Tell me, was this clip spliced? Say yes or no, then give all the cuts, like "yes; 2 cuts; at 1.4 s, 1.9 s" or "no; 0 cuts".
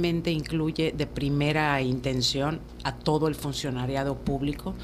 no; 0 cuts